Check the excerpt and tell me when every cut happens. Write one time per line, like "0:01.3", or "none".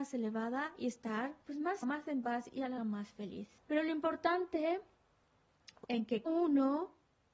0:01.4
0:01.8
0:02.8
0:03.6
0:05.8
0:06.3